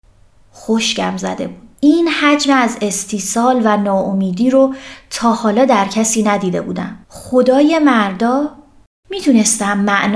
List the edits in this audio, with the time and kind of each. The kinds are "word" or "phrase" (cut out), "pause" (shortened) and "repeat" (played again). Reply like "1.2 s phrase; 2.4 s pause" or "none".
1.8 s pause; 7.0 s pause